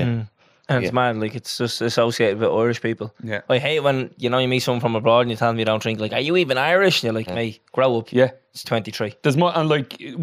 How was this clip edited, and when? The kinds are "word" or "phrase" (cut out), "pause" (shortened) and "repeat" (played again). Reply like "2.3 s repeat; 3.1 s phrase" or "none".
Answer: 7.3 s word; 8.1 s word; 8.6 s word